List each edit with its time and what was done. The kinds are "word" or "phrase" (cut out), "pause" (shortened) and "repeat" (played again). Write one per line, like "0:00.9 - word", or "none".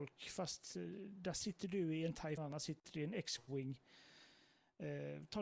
0:02.4 - phrase